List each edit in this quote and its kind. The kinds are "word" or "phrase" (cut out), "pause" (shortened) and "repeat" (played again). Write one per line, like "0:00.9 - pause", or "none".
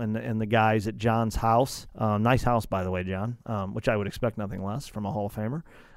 0:01.9 - pause